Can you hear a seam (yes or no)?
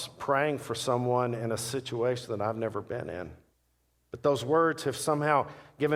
yes